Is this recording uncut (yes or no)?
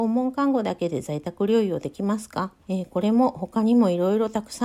no